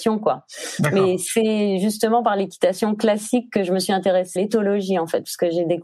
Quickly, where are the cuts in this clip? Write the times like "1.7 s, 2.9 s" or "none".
4.4 s

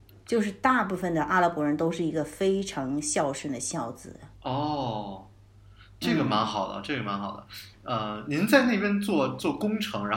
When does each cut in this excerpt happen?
4.3 s

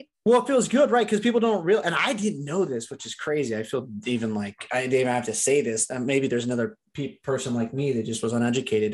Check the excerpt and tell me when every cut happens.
none

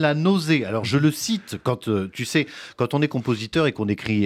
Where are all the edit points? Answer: none

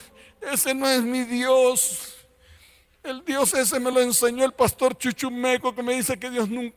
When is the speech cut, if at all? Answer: none

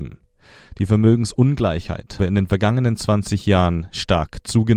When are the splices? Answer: 2.2 s

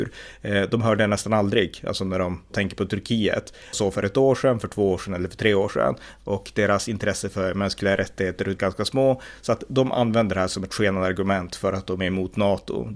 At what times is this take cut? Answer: 2.5 s, 3.7 s, 8.6 s

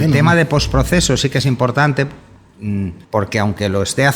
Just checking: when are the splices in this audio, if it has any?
3.0 s

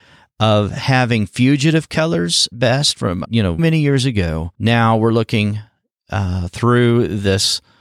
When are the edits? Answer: 2.5 s, 3.2 s, 3.6 s, 4.5 s

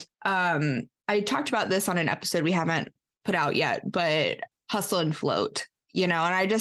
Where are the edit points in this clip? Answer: none

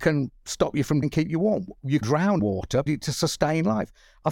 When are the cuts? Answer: 1.0 s, 2.0 s, 2.4 s, 2.9 s

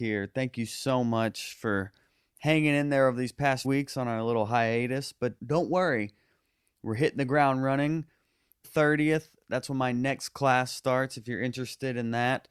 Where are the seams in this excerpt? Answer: 3.6 s, 5.4 s, 8.6 s

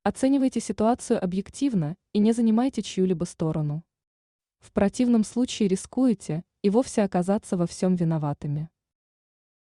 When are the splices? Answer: none

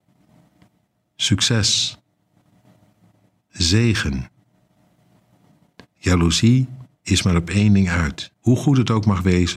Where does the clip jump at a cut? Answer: 6.9 s, 8.4 s

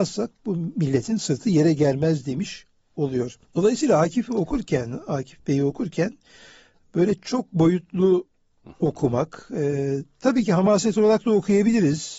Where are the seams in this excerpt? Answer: 3.4 s

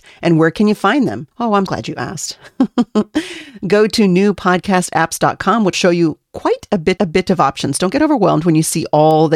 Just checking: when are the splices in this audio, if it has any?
1.3 s, 1.7 s, 5.7 s, 7.0 s

